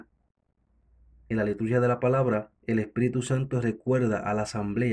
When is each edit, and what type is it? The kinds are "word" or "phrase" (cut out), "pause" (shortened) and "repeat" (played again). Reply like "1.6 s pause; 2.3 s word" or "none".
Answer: 2.6 s pause

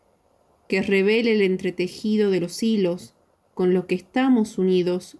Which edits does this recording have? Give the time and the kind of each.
none

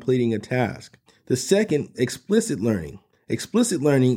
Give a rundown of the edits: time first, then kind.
1.1 s pause; 1.9 s word; 3.1 s pause

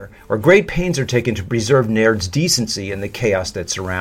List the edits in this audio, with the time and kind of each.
none

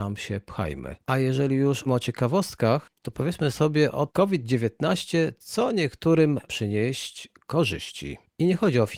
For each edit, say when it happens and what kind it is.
1.0 s pause; 1.9 s word; 4.1 s phrase; 6.4 s word

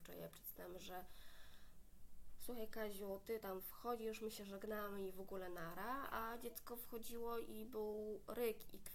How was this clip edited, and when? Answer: none

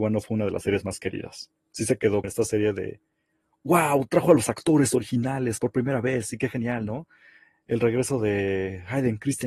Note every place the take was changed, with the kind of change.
2.2 s word

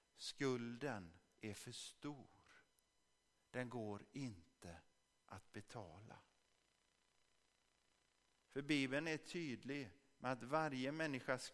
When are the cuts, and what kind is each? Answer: none

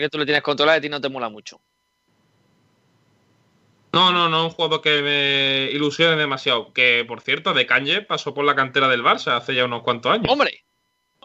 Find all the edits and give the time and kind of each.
none

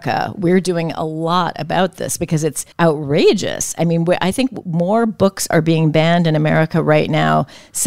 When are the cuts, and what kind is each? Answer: 2.7 s pause

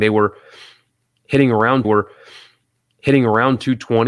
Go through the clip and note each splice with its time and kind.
1.8 s repeat

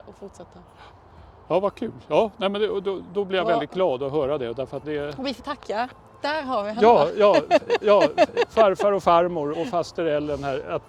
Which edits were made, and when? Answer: 4.8 s word; 5.4 s word; 7.8 s repeat; 9.5 s word

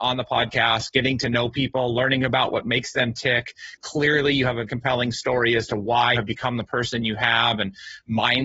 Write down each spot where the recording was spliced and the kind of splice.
4.7 s word; 6.1 s word

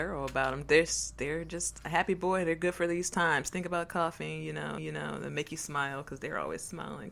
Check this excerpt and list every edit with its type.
4.8 s repeat

